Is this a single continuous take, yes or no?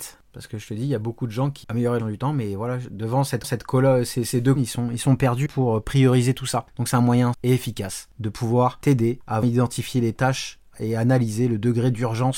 no